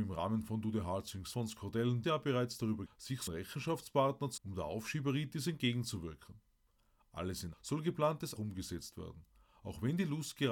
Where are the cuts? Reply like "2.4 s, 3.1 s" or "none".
1.3 s, 2.0 s, 2.9 s, 3.3 s, 4.4 s, 7.5 s, 8.4 s